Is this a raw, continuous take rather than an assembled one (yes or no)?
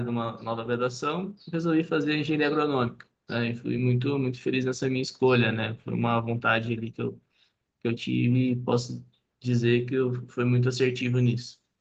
yes